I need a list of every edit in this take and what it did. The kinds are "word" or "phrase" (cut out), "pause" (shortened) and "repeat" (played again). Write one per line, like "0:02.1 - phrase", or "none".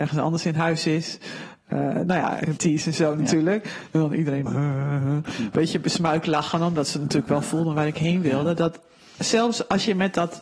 0:02.6 - word
0:04.5 - word